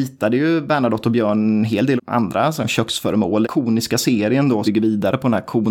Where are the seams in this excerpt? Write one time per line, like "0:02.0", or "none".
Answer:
0:02.0
0:03.4
0:04.6

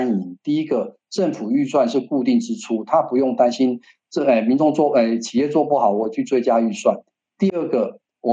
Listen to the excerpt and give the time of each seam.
none

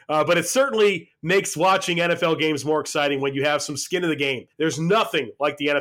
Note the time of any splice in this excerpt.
0:04.5

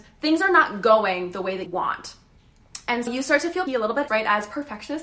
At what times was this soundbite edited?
0:01.7
0:03.1
0:03.7
0:04.1

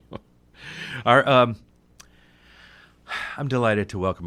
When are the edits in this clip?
none

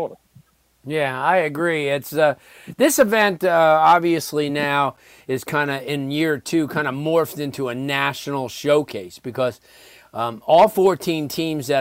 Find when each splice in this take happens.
none

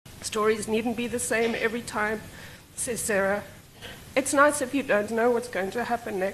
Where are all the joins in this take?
0:05.1

